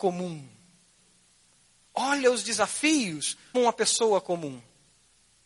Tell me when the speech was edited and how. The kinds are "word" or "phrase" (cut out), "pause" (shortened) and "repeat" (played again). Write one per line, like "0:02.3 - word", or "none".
0:03.5 - word